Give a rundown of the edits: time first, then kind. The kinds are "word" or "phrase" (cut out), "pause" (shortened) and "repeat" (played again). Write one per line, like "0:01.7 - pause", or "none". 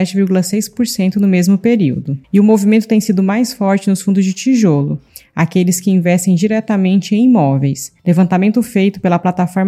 0:02.2 - pause
0:08.0 - pause

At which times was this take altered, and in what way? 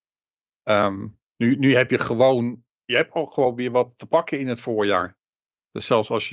0:01.3 - pause
0:02.7 - pause

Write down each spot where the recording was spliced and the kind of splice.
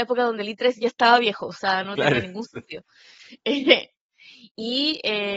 none

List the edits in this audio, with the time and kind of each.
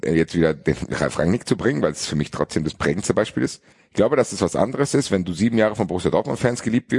0:03.7 - pause

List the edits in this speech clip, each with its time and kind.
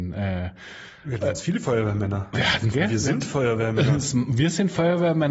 0:02.7 - word

